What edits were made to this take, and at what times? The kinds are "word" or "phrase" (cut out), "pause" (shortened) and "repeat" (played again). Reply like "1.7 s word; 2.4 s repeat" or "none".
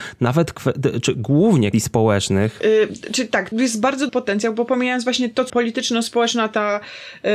1.7 s word; 3.5 s word; 4.1 s word; 5.5 s word